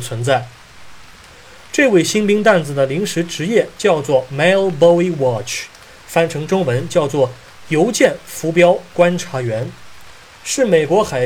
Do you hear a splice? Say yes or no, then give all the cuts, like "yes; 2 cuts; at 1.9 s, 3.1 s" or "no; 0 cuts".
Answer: no; 0 cuts